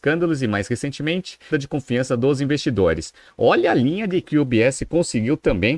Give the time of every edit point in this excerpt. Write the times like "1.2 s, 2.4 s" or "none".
1.5 s, 4.2 s